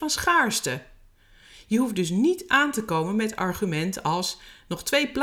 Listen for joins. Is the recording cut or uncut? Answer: uncut